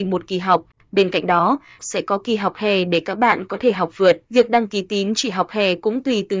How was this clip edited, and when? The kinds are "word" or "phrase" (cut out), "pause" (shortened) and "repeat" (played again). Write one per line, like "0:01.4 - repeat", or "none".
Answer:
0:01.8 - phrase
0:04.3 - pause